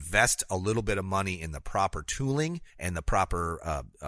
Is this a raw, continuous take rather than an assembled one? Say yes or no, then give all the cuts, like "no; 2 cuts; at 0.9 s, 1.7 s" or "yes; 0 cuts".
no; 1 cut; at 2.7 s